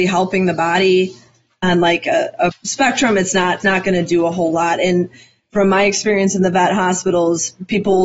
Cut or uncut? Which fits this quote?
cut